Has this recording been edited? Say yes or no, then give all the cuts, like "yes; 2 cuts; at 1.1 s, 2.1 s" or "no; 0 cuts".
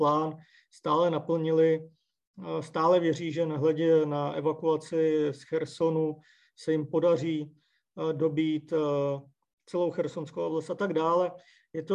no; 0 cuts